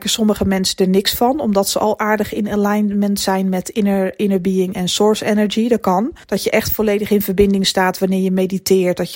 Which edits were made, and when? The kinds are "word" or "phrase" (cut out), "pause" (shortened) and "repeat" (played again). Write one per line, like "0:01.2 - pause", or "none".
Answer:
0:06.2 - pause